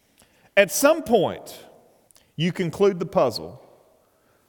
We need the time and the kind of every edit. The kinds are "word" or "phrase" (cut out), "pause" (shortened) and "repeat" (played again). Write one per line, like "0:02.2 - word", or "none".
0:02.1 - pause